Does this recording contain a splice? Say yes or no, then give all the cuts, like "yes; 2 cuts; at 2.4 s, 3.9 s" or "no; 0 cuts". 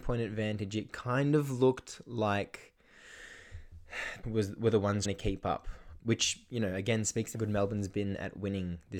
yes; 4 cuts; at 4.2 s, 5.1 s, 6.0 s, 7.3 s